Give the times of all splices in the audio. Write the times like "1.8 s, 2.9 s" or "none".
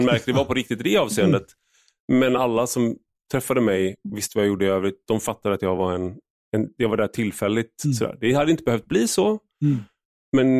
none